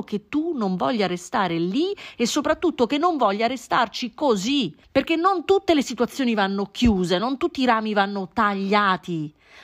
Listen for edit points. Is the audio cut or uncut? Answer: cut